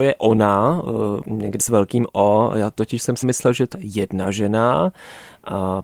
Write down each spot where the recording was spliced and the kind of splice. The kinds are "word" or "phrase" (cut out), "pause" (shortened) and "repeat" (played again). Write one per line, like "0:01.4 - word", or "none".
0:01.2 - word
0:01.6 - word
0:03.2 - phrase
0:03.7 - word